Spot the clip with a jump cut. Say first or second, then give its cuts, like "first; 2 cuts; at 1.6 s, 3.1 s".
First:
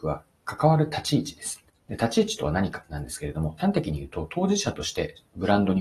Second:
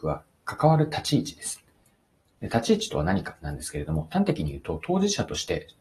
first; 1 cut; at 1.7 s